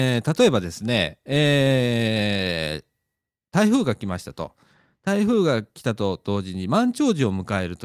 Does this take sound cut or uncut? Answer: uncut